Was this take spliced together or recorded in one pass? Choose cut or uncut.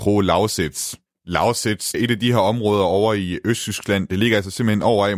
cut